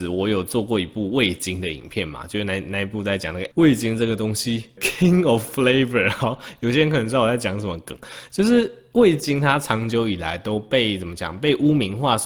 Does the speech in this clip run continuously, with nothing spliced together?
no; 2 cuts; at 3.5 s, 4.8 s

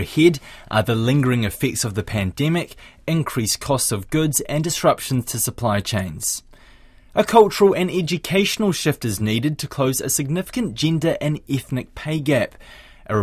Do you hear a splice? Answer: no; 0 cuts

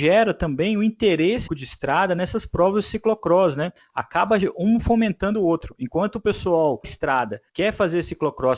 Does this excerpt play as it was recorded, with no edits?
no; 3 cuts; at 1.5 s, 6.8 s, 7.5 s

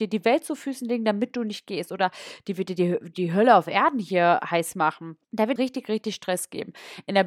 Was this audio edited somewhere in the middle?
yes; 3 cuts; at 3.1 s, 5.2 s, 5.6 s

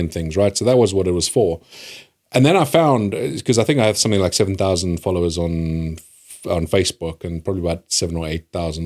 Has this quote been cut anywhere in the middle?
no; 0 cuts

